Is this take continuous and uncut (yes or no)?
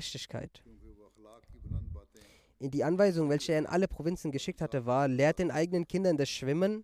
yes